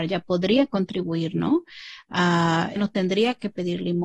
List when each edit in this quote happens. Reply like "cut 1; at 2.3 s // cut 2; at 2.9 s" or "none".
cut 1; at 2.8 s